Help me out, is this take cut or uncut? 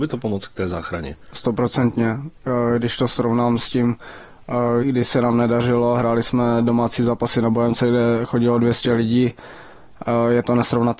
cut